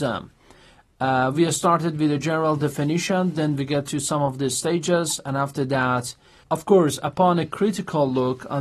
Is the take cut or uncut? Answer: uncut